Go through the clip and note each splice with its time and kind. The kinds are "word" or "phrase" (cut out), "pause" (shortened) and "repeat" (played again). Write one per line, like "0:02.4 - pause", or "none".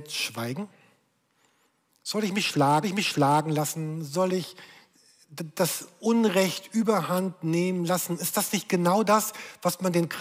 0:02.8 - repeat